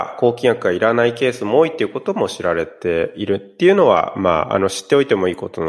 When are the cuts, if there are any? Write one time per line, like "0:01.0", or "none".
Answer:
none